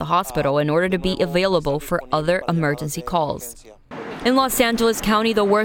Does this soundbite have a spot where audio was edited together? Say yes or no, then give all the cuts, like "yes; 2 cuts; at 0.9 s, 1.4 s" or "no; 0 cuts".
no; 0 cuts